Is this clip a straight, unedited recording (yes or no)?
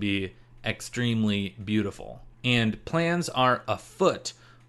no